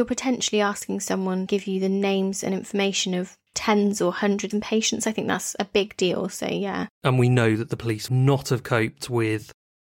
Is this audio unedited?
no; 5 cuts; at 1.5 s, 3.5 s, 4.5 s, 6.9 s, 8.1 s

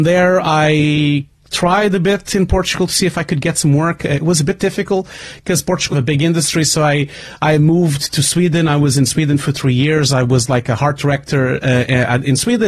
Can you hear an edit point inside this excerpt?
yes; 1 cut; at 5.9 s

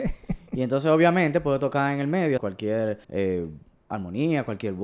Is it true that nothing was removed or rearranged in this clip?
no; 2 cuts; at 2.4 s, 3.0 s

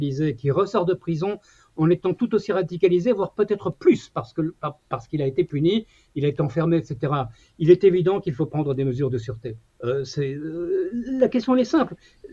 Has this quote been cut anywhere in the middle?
no; 0 cuts

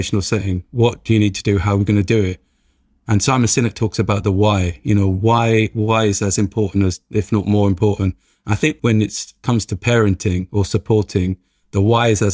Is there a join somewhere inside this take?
no; 0 cuts

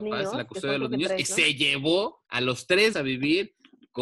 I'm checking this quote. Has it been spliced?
yes; 2 cuts; at 2.2 s, 2.9 s

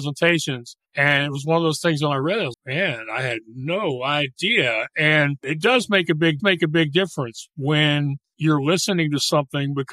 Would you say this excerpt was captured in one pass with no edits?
no; 2 cuts; at 2.5 s, 6.4 s

